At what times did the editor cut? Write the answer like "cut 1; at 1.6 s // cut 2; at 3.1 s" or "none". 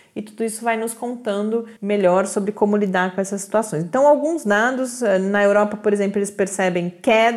cut 1; at 1.8 s